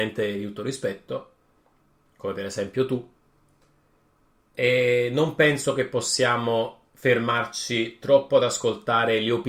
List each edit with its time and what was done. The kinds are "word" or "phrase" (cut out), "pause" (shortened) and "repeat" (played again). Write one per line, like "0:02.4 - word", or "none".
none